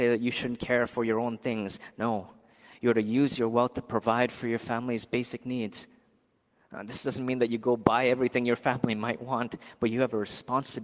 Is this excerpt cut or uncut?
uncut